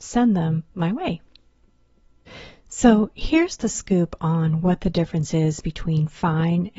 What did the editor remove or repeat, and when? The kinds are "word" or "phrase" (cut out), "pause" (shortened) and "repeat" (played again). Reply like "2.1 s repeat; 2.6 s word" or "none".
none

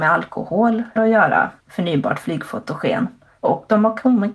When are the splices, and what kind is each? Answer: 1.0 s word; 1.6 s pause

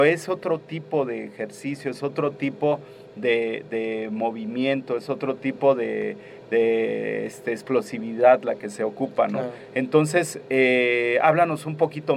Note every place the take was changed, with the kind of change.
none

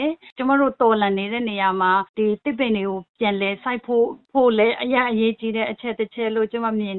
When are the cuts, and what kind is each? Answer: 2.1 s pause

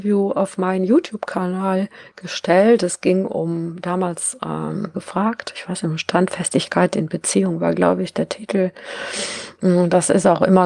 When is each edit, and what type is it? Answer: 4.9 s phrase

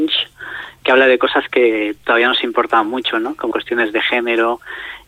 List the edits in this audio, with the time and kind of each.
3.5 s word

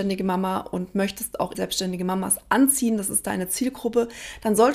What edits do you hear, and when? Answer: 1.5 s word

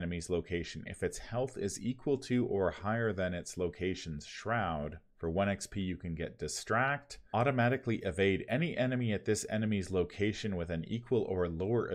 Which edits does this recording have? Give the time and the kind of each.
5.1 s pause

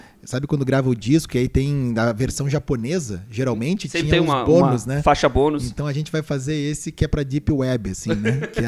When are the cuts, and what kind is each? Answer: none

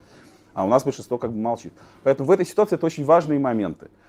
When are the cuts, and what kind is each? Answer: none

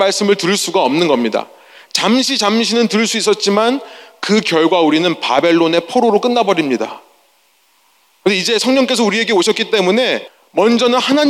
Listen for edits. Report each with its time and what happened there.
none

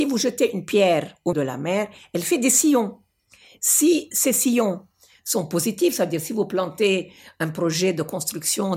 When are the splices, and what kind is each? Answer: 1.3 s word

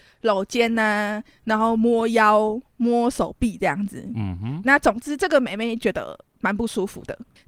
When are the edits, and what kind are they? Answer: 4.6 s word

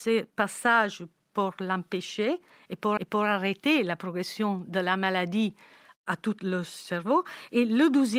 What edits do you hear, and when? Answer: 3.0 s repeat

